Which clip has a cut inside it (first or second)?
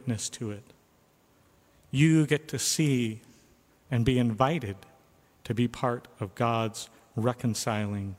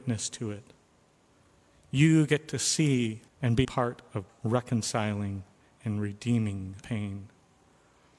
second